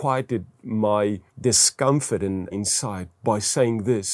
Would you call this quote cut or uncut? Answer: cut